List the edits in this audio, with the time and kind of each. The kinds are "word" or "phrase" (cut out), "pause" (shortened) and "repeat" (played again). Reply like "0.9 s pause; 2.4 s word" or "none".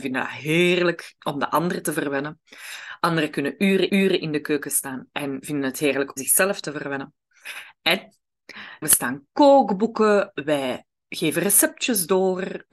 1.2 s word; 3.9 s repeat; 6.2 s word; 8.8 s word